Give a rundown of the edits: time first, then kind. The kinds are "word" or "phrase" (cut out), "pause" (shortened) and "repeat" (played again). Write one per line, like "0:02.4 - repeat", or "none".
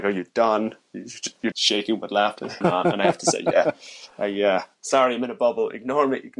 0:01.5 - word
0:02.6 - phrase